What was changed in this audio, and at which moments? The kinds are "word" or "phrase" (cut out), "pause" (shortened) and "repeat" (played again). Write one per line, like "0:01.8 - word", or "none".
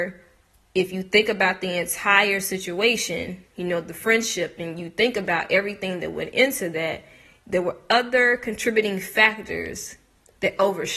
0:03.5 - pause